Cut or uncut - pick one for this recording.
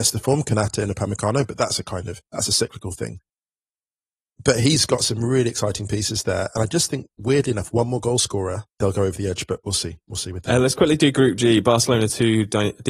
cut